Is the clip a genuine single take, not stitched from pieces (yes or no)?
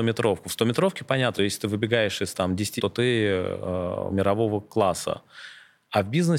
no